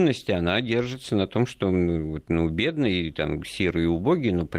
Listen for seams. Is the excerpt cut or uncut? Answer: uncut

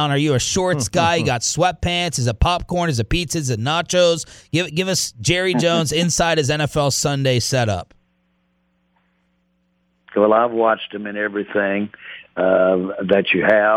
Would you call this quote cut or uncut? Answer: uncut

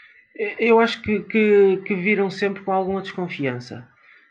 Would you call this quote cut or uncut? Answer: uncut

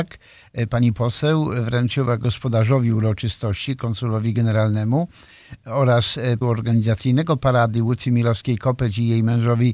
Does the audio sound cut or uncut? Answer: cut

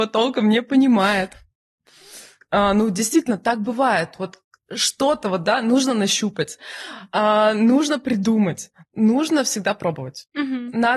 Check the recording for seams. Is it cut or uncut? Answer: uncut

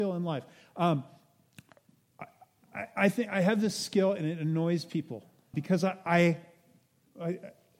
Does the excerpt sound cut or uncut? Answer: cut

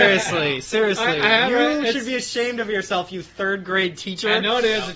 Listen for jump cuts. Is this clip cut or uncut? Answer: uncut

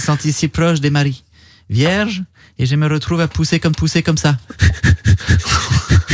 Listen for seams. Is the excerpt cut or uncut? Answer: cut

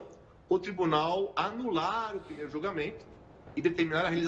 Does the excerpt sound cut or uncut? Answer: uncut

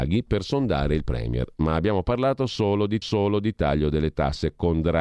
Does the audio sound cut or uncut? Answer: cut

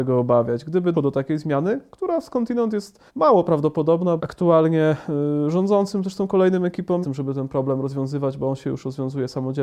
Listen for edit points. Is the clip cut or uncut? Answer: cut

